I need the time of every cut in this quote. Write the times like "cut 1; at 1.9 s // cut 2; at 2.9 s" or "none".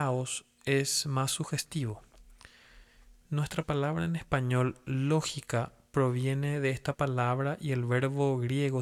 none

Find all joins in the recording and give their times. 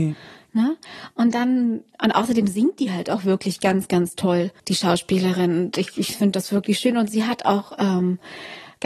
cut 1; at 4.6 s

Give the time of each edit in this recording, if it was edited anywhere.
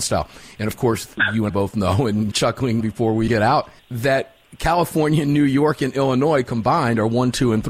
cut 1; at 1.5 s // cut 2; at 2.3 s // cut 3; at 2.8 s // cut 4; at 3.3 s // cut 5; at 3.8 s

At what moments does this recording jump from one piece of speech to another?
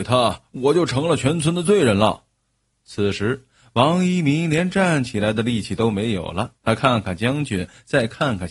cut 1; at 6.6 s

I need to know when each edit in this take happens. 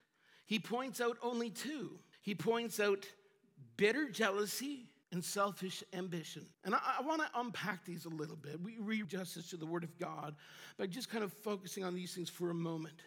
cut 1; at 2.1 s // cut 2; at 5.0 s // cut 3; at 6.5 s // cut 4; at 9.0 s

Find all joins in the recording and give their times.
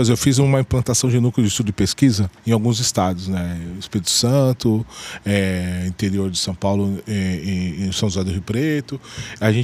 cut 1; at 2.4 s

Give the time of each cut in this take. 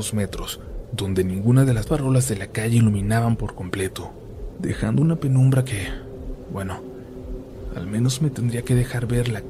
cut 1; at 1.9 s

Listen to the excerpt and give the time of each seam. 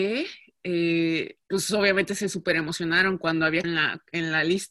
cut 1; at 1.4 s // cut 2; at 3.6 s

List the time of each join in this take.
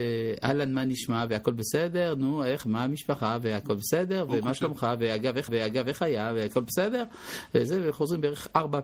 cut 1; at 2.6 s // cut 2; at 5.5 s

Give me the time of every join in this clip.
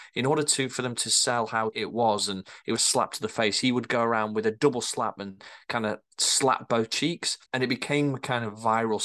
cut 1; at 1.7 s // cut 2; at 2.8 s // cut 3; at 7.5 s

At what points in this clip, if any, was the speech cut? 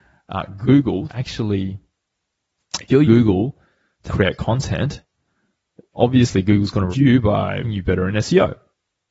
cut 1; at 1.1 s // cut 2; at 3.0 s // cut 3; at 4.1 s // cut 4; at 5.9 s // cut 5; at 6.9 s // cut 6; at 7.6 s

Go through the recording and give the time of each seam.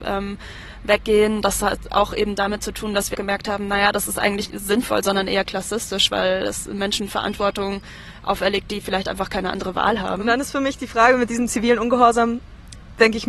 cut 1; at 3.1 s // cut 2; at 4.5 s

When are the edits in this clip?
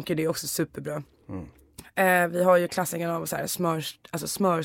none

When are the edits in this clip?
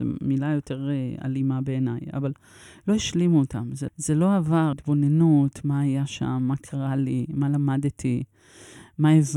cut 1; at 3.9 s // cut 2; at 4.7 s

